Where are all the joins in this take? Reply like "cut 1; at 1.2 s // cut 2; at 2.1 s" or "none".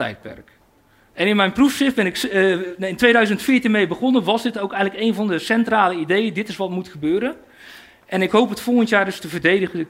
none